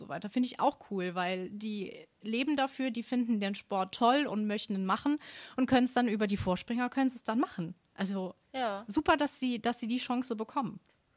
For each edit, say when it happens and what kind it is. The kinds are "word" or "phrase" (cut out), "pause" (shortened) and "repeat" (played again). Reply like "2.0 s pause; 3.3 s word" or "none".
8.4 s pause